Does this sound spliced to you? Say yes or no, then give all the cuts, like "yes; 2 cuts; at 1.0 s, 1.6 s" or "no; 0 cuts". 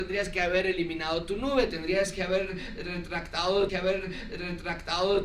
yes; 1 cut; at 3.7 s